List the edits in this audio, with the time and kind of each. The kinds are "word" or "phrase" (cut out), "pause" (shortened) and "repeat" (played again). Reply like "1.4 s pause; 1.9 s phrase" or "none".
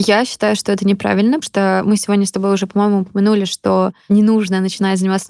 1.4 s word